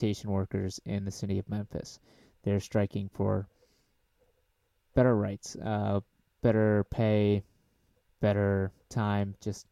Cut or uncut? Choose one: uncut